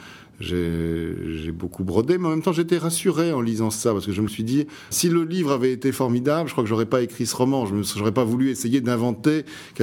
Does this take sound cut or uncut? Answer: cut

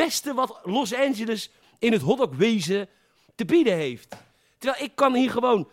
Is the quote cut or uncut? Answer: uncut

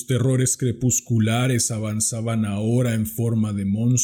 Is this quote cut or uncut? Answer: uncut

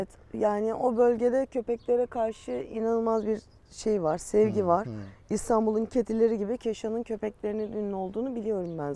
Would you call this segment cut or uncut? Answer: uncut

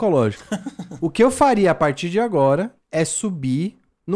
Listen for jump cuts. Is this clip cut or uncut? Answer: uncut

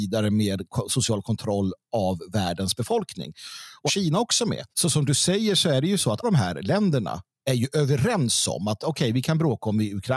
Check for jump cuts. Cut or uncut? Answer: cut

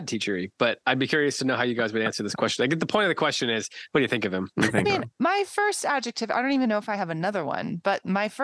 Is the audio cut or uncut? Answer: cut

